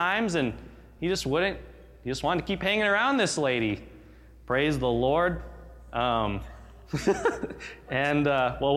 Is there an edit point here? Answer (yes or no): no